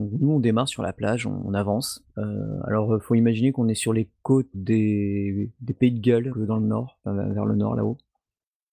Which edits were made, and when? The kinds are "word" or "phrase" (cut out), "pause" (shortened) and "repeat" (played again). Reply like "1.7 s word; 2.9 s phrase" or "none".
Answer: 2.1 s pause; 4.5 s word; 6.3 s word